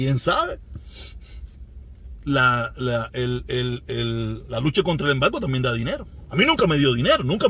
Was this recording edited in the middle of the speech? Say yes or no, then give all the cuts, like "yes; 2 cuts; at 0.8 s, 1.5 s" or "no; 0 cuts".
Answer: no; 0 cuts